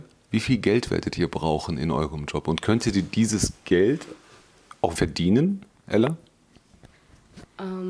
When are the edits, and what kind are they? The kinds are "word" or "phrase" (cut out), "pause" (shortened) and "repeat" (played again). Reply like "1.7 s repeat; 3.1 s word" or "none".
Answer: 5.0 s word